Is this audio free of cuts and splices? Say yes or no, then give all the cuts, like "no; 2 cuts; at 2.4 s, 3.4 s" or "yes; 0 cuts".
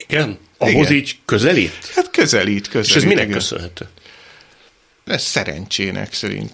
yes; 0 cuts